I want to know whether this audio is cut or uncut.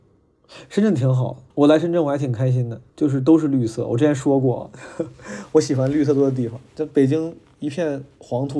cut